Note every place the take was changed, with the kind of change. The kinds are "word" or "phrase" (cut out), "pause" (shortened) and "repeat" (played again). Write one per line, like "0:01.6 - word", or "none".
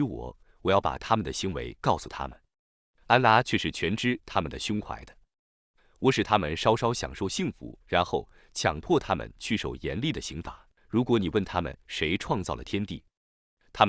0:07.8 - pause
0:10.8 - pause